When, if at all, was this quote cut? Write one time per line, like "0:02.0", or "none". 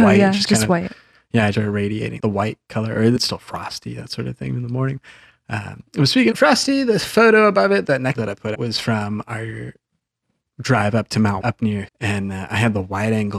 0:01.5
0:02.2
0:03.2
0:06.3
0:08.1
0:08.5
0:11.4
0:11.9